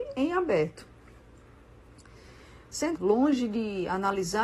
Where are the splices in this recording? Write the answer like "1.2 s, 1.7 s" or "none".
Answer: 3.0 s